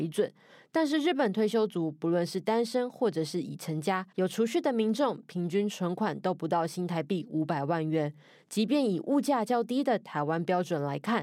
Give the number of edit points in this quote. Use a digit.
1